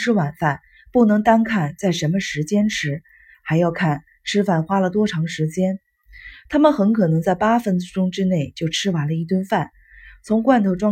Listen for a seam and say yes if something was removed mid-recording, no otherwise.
no